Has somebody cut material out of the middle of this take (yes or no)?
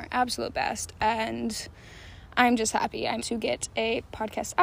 yes